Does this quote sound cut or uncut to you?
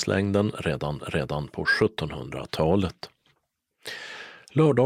cut